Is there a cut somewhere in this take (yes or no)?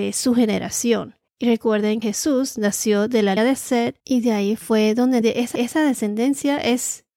yes